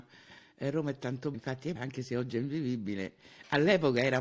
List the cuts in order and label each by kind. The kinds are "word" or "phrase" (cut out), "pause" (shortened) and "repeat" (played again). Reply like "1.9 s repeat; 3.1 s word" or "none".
1.3 s word; 1.8 s word